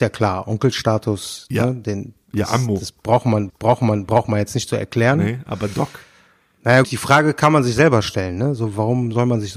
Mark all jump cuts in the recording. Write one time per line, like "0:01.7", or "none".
0:03.5
0:06.8